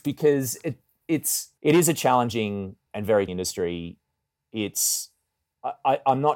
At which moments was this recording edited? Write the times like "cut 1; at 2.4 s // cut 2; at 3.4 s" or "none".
cut 1; at 1.6 s // cut 2; at 2.9 s // cut 3; at 3.3 s